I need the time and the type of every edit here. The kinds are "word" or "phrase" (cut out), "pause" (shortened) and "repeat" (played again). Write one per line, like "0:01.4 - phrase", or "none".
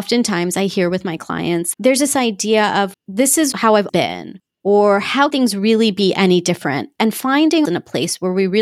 0:01.7 - word
0:02.9 - word
0:03.9 - word
0:05.3 - word
0:07.6 - word